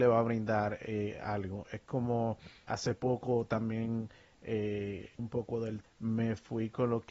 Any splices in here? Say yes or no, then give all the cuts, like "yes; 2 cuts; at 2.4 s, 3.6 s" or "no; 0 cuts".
yes; 3 cuts; at 2.7 s, 5.2 s, 5.8 s